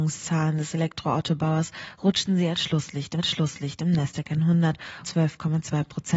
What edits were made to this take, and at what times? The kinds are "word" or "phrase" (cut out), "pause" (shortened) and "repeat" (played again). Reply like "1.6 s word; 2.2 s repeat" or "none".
3.2 s repeat; 5.0 s word